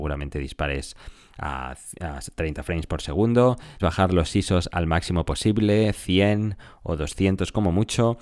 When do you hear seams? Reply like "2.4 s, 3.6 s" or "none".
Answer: 3.8 s